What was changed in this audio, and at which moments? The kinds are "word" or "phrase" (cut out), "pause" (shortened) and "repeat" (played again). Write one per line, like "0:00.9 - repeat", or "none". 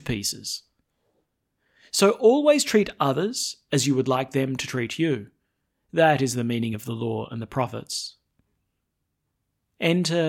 none